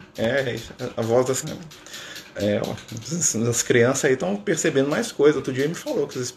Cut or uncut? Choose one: cut